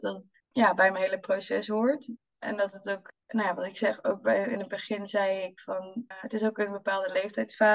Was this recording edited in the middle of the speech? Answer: no; 0 cuts

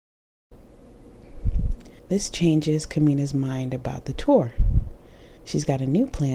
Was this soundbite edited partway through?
yes; 2 cuts; at 2.0 s, 5.4 s

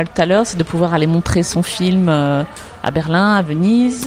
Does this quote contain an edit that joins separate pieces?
no; 0 cuts

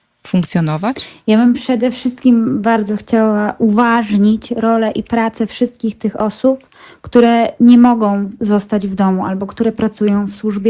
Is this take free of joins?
yes; 0 cuts

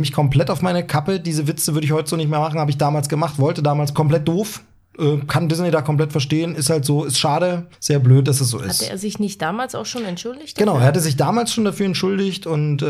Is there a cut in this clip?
yes; 2 cuts; at 4.0 s, 7.7 s

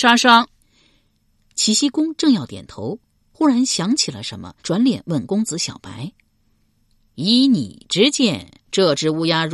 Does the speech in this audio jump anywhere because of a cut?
yes; 1 cut; at 4.6 s

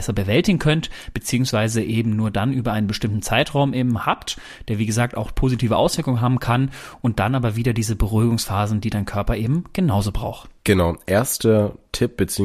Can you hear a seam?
no; 0 cuts

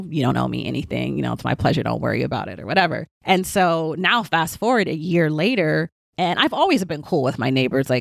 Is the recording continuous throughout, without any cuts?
no; 1 cut; at 3.1 s

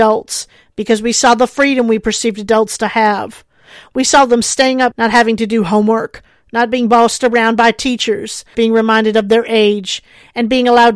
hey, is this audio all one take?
no; 2 cuts; at 4.9 s, 8.5 s

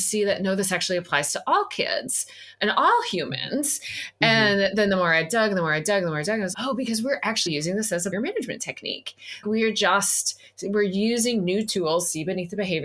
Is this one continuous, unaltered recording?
no; 4 cuts; at 6.5 s, 7.5 s, 8.1 s, 9.4 s

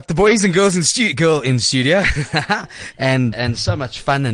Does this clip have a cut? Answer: yes; 1 cut; at 3.3 s

